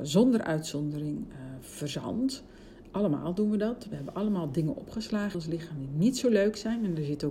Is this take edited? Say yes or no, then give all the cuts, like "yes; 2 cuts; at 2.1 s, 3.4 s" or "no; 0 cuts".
yes; 1 cut; at 5.3 s